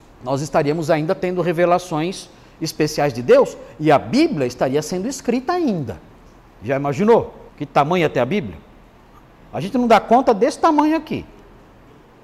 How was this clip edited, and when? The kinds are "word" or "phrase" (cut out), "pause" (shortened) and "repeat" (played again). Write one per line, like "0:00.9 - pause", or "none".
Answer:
0:07.5 - pause